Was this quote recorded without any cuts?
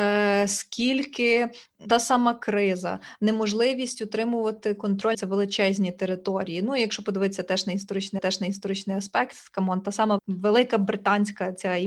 no; 4 cuts; at 1.9 s, 5.1 s, 8.2 s, 10.2 s

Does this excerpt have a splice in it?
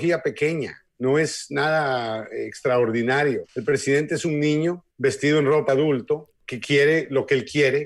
yes; 4 cuts; at 3.5 s, 4.9 s, 5.7 s, 6.4 s

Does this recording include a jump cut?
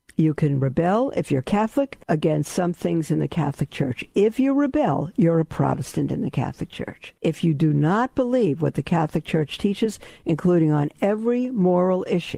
yes; 2 cuts; at 2.0 s, 7.2 s

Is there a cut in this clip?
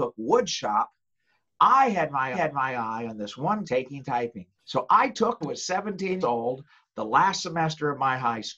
yes; 5 cuts; at 2.3 s, 3.6 s, 4.6 s, 5.4 s, 6.2 s

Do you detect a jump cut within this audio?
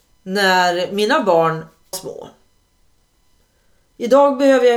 yes; 1 cut; at 1.9 s

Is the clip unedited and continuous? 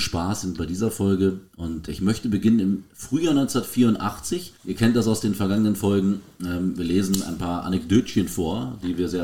no; 2 cuts; at 1.9 s, 4.6 s

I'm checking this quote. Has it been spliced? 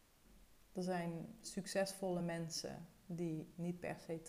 no; 0 cuts

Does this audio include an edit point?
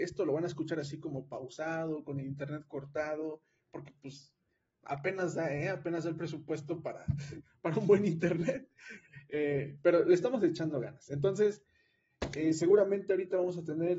no; 0 cuts

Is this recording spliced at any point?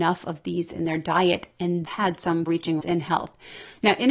yes; 3 cuts; at 1.9 s, 2.5 s, 2.8 s

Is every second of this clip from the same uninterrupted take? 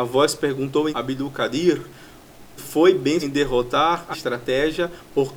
no; 4 cuts; at 0.9 s, 2.6 s, 3.2 s, 4.1 s

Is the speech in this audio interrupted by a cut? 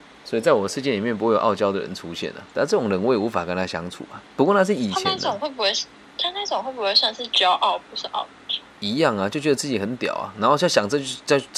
yes; 3 cuts; at 2.5 s, 6.0 s, 8.7 s

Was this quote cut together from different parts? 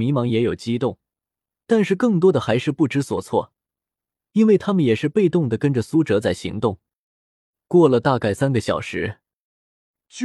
no; 0 cuts

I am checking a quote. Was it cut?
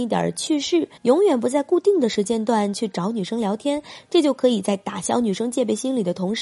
yes; 1 cut; at 1.0 s

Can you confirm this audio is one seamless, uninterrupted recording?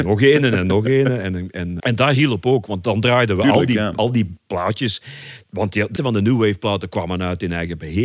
no; 2 cuts; at 1.8 s, 6.0 s

